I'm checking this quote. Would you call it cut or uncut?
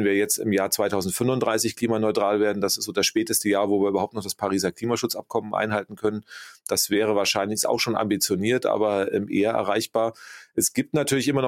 uncut